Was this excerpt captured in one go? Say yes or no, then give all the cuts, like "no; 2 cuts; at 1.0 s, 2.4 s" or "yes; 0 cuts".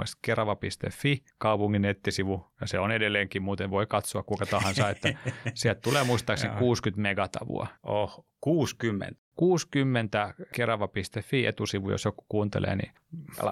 no; 2 cuts; at 1.3 s, 2.5 s